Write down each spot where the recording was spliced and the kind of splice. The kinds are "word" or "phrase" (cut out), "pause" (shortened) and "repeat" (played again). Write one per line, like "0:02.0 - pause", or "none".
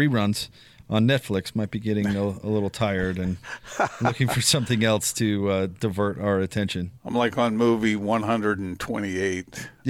0:07.0 - pause